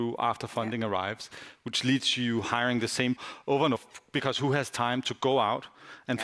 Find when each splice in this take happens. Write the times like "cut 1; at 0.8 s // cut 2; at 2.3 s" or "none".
cut 1; at 3.2 s // cut 2; at 3.7 s